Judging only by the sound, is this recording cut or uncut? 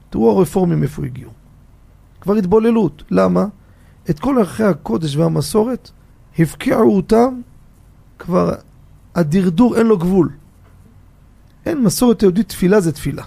cut